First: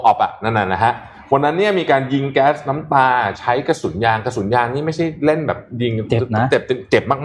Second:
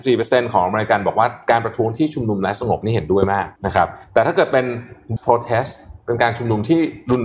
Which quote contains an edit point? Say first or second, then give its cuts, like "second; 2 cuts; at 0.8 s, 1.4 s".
second; 3 cuts; at 3.6 s, 4.0 s, 5.2 s